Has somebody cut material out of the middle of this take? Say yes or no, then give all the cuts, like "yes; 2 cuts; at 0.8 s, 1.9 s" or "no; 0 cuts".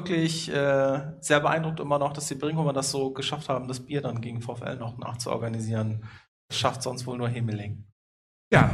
no; 0 cuts